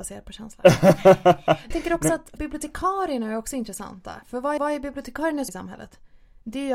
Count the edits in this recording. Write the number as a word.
four